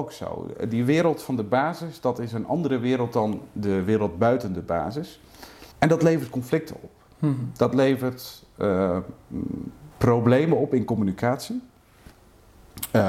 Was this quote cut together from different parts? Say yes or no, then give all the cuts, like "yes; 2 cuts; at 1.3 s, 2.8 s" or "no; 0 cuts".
yes; 2 cuts; at 5.7 s, 9.9 s